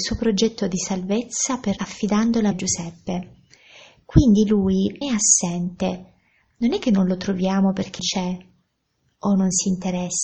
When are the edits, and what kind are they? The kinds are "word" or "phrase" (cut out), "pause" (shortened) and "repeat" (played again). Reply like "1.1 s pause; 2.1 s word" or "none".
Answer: 1.8 s word; 2.5 s word; 5.0 s word; 8.0 s word